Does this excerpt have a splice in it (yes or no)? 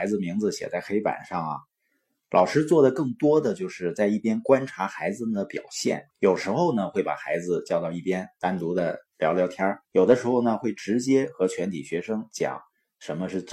yes